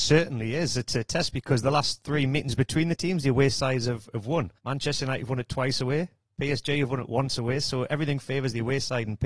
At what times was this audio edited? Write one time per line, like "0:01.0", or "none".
0:04.6